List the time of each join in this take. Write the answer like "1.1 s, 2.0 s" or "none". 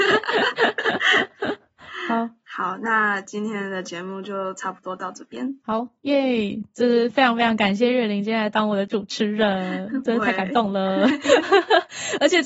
5.6 s

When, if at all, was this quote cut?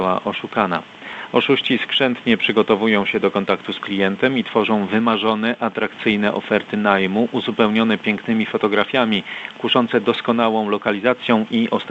3.8 s

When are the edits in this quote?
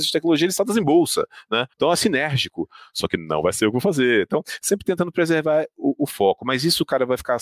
1.7 s

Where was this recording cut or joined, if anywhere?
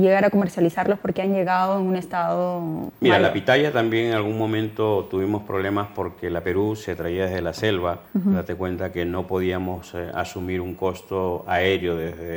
6.4 s, 8.0 s

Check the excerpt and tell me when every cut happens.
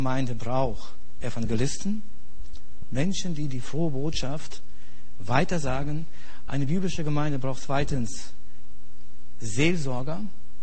none

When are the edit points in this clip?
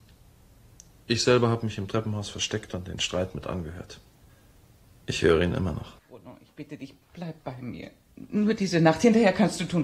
4.3 s, 6.0 s, 7.0 s, 8.1 s

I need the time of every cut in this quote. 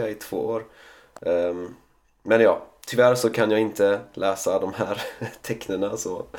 none

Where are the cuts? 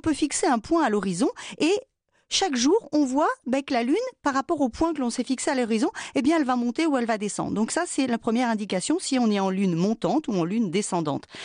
none

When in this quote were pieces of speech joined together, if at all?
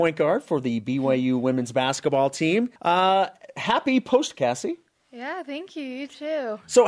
2.8 s, 4.3 s

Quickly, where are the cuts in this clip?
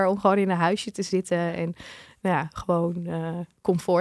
none

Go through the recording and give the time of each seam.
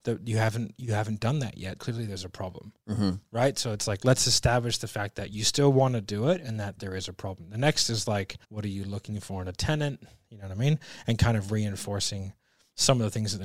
1.8 s, 6.8 s, 8.4 s

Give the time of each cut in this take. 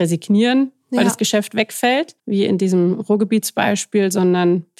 2.2 s

